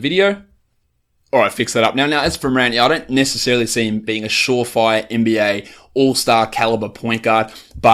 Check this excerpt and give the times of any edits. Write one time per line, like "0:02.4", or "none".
0:04.1